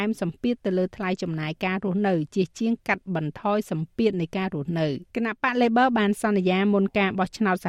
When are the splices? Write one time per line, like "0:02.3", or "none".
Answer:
0:05.1